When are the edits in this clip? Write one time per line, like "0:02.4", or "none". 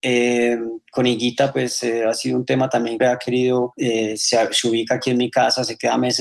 0:03.0
0:03.7